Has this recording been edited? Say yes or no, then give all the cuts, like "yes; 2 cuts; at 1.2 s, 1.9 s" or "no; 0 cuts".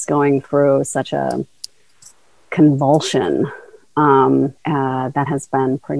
yes; 1 cut; at 4.6 s